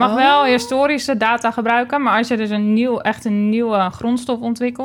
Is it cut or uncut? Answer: uncut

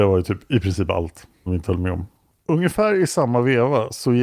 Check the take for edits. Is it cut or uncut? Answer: cut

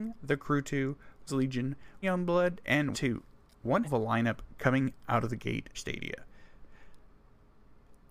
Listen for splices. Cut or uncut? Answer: cut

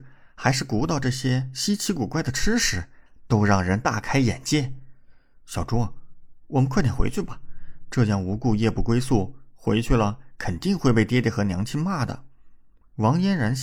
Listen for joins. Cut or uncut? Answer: uncut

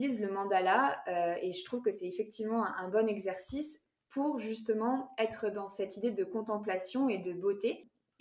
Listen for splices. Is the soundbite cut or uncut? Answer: uncut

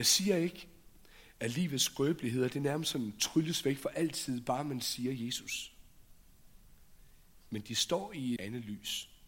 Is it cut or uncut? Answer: cut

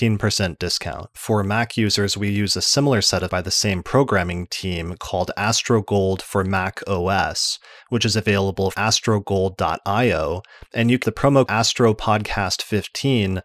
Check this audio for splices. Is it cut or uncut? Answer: cut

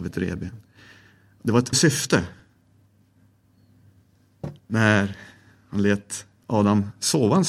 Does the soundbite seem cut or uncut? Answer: cut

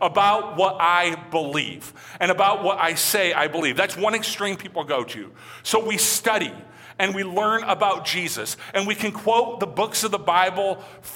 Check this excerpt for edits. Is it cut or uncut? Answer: uncut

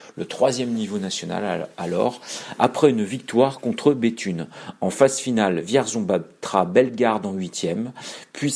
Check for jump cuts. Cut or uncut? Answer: uncut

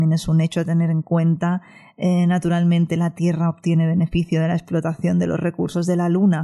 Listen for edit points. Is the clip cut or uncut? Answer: uncut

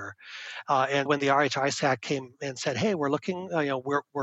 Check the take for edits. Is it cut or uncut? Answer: cut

